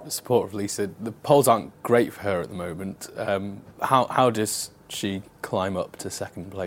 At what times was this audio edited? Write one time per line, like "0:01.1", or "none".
0:03.7